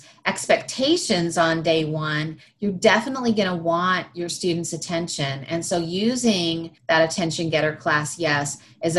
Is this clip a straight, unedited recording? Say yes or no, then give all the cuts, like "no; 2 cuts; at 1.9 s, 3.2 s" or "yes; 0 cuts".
no; 1 cut; at 6.8 s